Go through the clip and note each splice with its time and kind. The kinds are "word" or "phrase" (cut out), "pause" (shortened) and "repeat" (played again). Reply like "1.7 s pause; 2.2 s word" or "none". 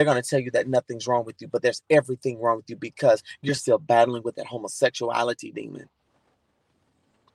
none